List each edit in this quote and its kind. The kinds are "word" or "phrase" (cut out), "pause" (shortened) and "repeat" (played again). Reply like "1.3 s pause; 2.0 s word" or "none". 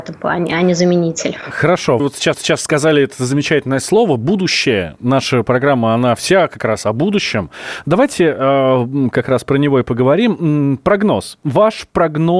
2.0 s word; 2.3 s repeat